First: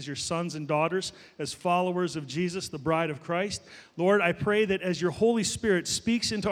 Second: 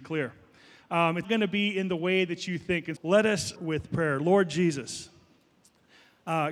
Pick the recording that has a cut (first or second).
second